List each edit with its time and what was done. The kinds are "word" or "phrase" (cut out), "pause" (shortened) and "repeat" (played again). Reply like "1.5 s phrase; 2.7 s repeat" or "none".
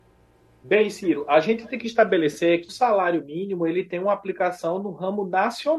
2.7 s word

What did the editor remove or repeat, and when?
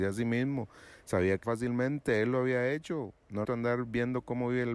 1.4 s phrase; 3.4 s word

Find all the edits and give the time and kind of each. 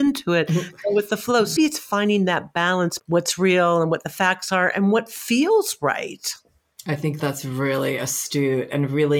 1.6 s word; 3.0 s word; 7.2 s word

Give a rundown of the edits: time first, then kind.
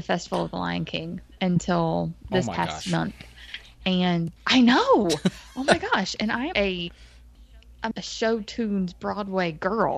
4.4 s pause; 6.5 s word; 7.9 s word

